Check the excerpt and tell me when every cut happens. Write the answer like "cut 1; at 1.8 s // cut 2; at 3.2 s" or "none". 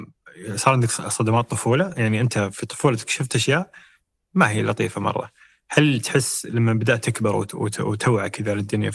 none